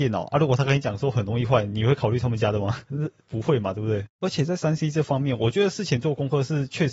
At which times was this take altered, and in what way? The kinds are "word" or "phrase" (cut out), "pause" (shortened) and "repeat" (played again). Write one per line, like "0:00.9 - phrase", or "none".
0:04.1 - pause